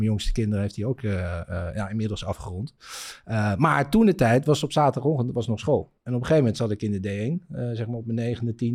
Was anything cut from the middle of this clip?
yes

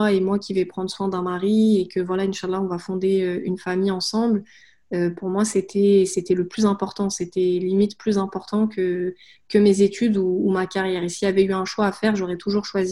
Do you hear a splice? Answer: no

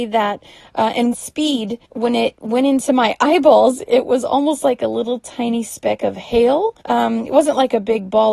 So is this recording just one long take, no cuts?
no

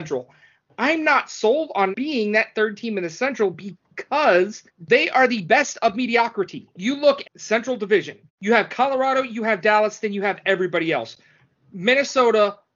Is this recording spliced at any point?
yes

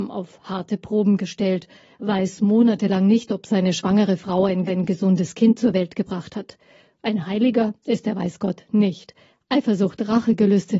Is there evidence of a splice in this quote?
yes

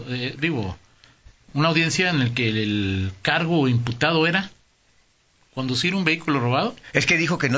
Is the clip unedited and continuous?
yes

